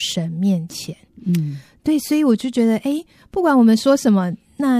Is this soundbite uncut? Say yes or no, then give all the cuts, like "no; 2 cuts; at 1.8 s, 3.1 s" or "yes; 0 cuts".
yes; 0 cuts